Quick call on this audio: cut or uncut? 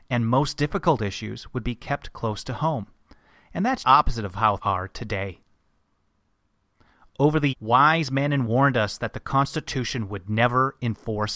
cut